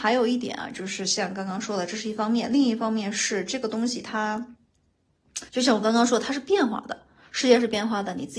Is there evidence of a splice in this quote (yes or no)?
yes